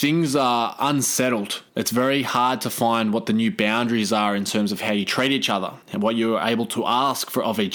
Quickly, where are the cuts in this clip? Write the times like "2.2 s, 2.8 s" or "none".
1.7 s, 5.8 s